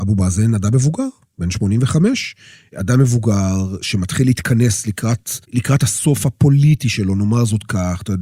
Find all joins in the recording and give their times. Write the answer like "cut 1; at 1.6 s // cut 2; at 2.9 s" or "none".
cut 1; at 5.4 s